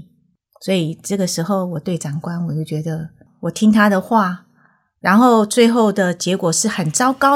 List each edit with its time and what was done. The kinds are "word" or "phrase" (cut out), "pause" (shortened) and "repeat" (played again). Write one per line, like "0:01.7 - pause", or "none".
none